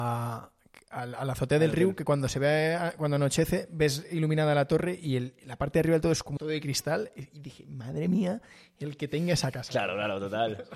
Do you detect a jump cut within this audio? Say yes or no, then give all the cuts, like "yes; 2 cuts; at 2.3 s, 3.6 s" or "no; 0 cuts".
yes; 1 cut; at 6.4 s